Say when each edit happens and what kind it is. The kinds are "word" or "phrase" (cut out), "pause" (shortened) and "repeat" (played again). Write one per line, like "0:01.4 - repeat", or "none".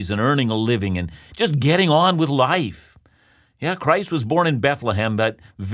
none

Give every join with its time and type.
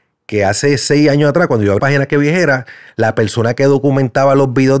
0:01.8 - word

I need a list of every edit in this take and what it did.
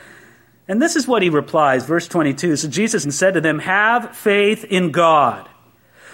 0:03.0 - word

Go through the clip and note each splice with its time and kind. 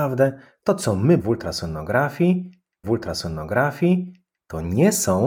0:01.2 - word
0:02.8 - repeat

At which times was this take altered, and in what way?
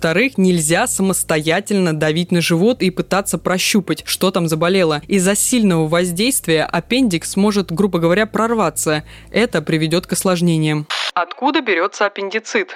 none

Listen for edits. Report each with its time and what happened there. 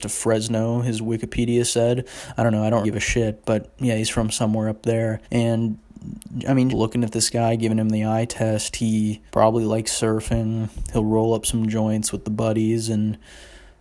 0:02.8 - word
0:05.2 - pause
0:06.7 - word
0:09.3 - pause

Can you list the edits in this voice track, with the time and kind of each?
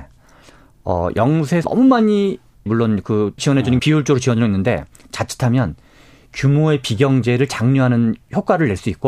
0:01.6 - word
0:02.7 - word
0:03.4 - word
0:03.8 - word

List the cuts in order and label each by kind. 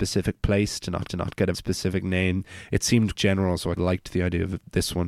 0:01.1 - repeat
0:01.5 - word
0:03.1 - word
0:03.8 - phrase

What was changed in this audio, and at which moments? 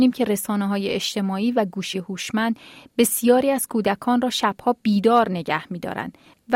0:01.9 - word

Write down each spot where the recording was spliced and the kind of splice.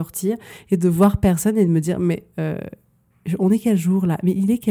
none

